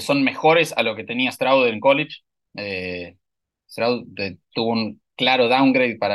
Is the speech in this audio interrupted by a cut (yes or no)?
no